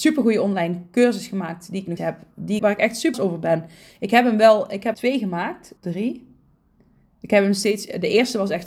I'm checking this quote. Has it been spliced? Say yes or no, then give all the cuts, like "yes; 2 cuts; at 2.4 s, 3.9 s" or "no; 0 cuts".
yes; 5 cuts; at 2.0 s, 2.6 s, 3.1 s, 4.9 s, 5.8 s